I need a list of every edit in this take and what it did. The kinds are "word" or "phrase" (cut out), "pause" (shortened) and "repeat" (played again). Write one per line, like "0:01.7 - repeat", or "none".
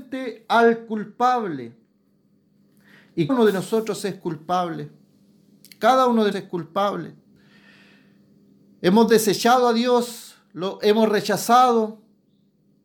0:03.3 - word
0:06.3 - word